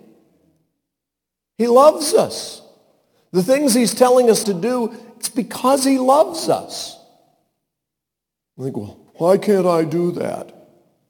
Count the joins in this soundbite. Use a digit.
2